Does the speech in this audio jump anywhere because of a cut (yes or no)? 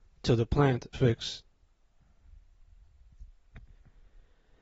yes